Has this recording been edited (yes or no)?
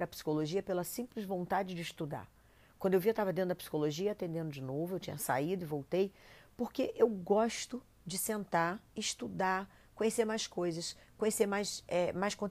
yes